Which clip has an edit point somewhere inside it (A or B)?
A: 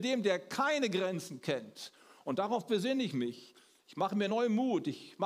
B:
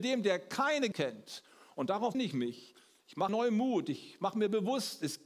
B